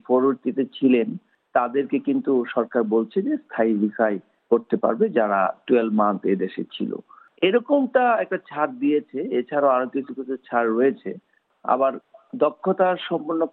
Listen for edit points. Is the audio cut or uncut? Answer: uncut